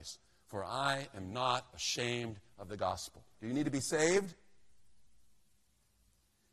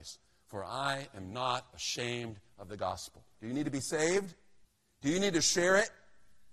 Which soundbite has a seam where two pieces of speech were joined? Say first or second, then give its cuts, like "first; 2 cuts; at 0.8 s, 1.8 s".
second; 1 cut; at 4.6 s